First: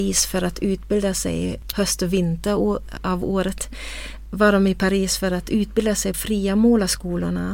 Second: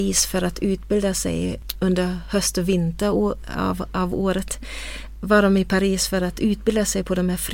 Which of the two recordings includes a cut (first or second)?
first